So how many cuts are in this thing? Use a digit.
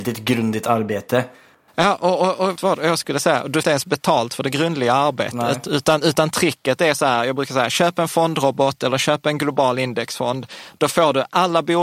2